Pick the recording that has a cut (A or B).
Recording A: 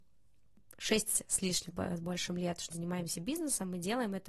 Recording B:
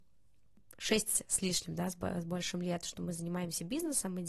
A